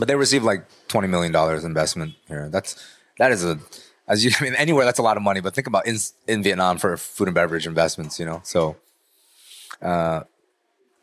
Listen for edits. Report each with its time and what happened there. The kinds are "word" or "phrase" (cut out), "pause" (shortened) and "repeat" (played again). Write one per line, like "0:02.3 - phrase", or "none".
none